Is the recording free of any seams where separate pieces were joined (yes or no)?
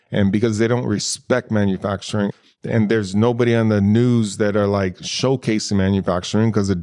yes